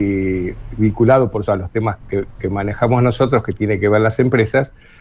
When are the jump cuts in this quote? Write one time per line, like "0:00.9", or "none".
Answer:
0:01.5
0:02.0